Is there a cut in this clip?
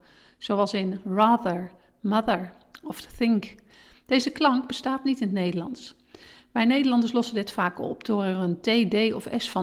no; 0 cuts

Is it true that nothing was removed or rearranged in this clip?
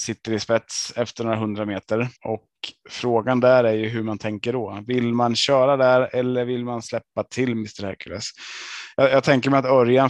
no; 1 cut; at 2.2 s

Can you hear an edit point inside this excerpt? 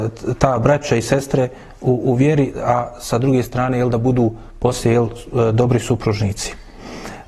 no; 0 cuts

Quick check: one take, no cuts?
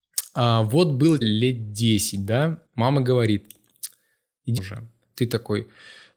no; 3 cuts; at 1.2 s, 2.7 s, 4.6 s

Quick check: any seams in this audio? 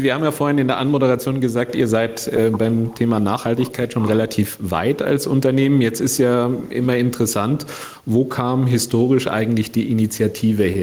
no; 0 cuts

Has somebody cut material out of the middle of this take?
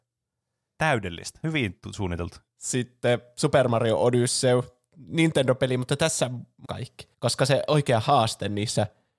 yes; 3 cuts; at 2.5 s, 6.6 s, 7.1 s

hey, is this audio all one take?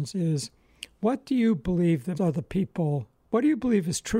no; 1 cut; at 2.1 s

